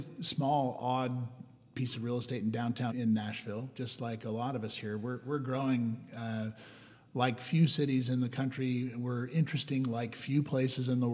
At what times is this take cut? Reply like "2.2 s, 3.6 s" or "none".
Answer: 2.9 s